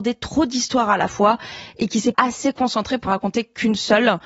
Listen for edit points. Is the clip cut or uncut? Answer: cut